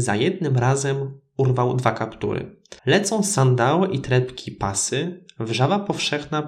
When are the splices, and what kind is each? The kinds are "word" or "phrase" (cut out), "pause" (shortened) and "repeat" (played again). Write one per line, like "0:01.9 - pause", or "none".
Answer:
0:02.8 - pause